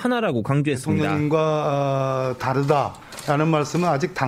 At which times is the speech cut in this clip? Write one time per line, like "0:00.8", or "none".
0:02.4